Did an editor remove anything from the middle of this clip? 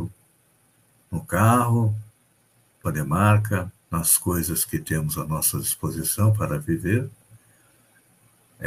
yes; 2 cuts; at 2.8 s, 3.8 s

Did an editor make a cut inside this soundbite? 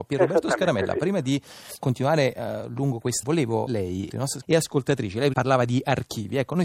yes; 6 cuts; at 1.8 s, 3.2 s, 3.7 s, 4.1 s, 4.4 s, 5.3 s

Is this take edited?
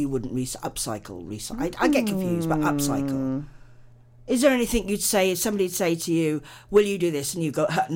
no; 0 cuts

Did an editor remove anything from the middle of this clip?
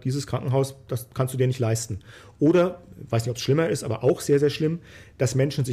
no; 0 cuts

